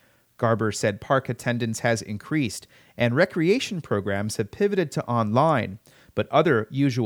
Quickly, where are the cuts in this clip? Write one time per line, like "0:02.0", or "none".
none